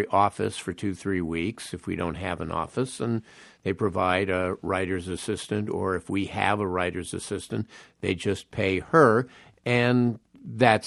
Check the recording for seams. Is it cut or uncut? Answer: uncut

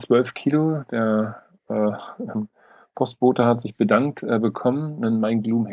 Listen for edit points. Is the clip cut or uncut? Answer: uncut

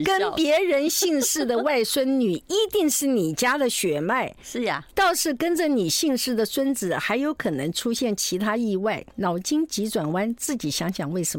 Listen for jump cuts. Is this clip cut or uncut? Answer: cut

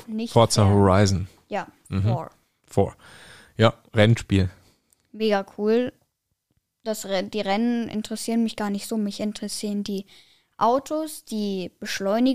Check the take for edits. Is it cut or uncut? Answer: uncut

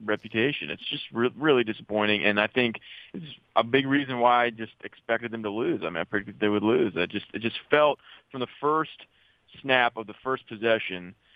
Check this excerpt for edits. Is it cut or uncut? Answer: uncut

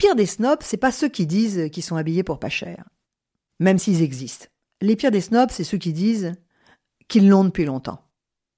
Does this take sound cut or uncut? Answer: uncut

